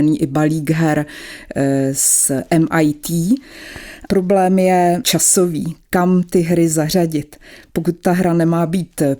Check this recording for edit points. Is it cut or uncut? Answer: cut